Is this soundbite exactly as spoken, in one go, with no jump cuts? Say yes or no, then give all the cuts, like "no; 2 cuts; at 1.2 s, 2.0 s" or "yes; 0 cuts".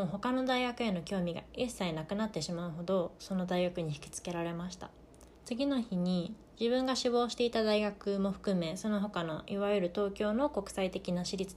no; 1 cut; at 5.3 s